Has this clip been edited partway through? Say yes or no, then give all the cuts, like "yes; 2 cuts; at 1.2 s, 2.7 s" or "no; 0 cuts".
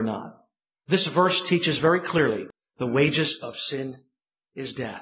no; 0 cuts